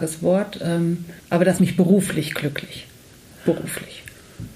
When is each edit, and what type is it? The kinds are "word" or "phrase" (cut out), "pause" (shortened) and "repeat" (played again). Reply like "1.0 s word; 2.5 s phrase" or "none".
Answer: 1.2 s pause; 1.6 s word